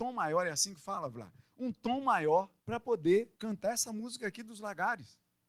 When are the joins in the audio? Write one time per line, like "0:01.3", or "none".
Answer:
0:02.6
0:03.4